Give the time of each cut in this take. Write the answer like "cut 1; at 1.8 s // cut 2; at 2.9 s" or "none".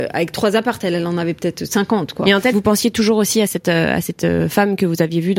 cut 1; at 2.5 s

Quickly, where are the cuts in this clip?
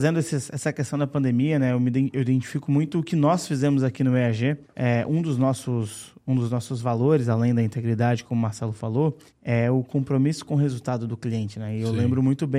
cut 1; at 4.6 s // cut 2; at 9.3 s

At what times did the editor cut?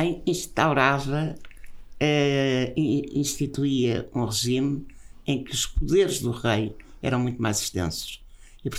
none

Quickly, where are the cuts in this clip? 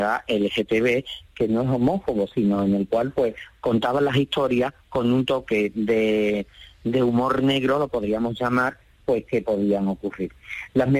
none

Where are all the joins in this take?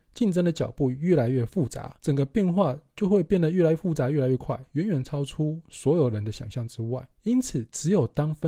cut 1; at 2.0 s // cut 2; at 7.1 s

